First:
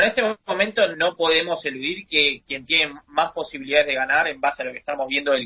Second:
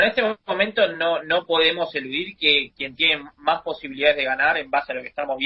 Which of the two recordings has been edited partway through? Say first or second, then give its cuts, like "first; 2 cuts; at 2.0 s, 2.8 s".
first; 1 cut; at 0.9 s